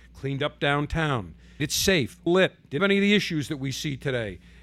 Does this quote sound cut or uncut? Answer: cut